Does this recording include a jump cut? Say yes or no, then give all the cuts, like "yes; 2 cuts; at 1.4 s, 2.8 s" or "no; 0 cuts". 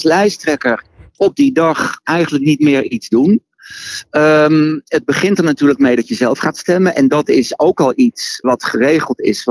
yes; 1 cut; at 8.4 s